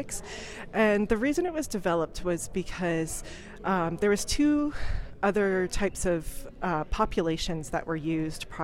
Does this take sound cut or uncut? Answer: uncut